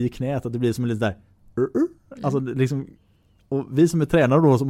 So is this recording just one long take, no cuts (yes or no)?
yes